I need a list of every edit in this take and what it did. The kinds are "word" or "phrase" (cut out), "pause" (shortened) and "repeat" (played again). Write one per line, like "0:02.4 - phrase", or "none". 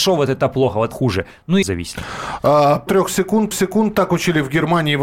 0:00.9 - phrase
0:01.6 - phrase
0:02.9 - word
0:03.5 - repeat